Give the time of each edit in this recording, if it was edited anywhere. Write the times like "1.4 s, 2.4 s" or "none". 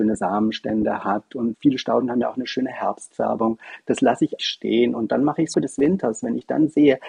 1.5 s, 4.4 s, 5.5 s

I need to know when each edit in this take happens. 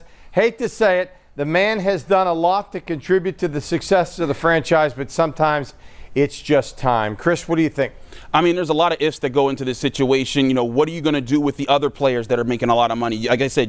none

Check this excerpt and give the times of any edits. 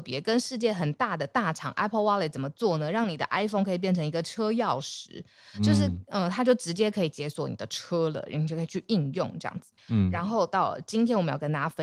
9.8 s

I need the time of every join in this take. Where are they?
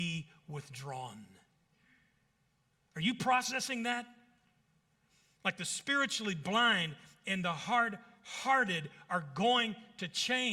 none

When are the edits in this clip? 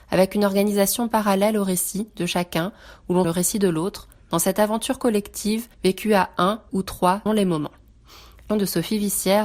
3.2 s, 5.7 s, 6.7 s, 7.3 s, 8.5 s

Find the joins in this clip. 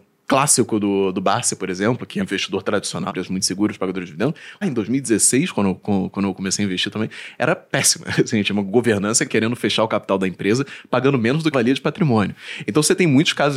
2.2 s, 3.1 s, 4.6 s, 9.3 s, 11.5 s

